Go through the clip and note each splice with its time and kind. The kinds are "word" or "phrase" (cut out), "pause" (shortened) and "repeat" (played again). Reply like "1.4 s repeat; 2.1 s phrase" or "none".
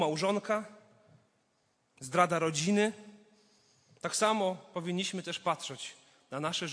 none